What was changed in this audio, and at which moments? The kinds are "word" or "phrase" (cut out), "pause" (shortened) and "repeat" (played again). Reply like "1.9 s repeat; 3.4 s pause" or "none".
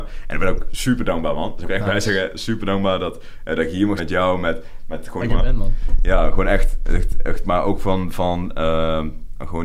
1.6 s phrase; 4.0 s word; 5.3 s phrase